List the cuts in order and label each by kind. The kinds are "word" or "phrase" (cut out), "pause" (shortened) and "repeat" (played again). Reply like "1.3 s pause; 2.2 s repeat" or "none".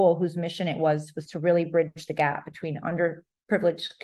none